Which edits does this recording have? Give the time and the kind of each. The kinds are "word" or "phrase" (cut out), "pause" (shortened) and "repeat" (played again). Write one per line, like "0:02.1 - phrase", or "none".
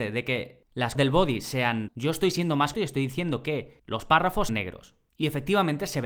0:01.0 - word
0:01.9 - word
0:02.7 - word
0:04.5 - word